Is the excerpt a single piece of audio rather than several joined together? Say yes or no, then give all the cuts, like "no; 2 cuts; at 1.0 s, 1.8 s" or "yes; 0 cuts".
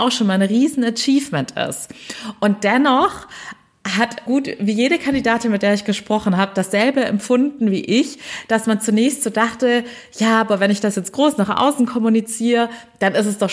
no; 1 cut; at 4.3 s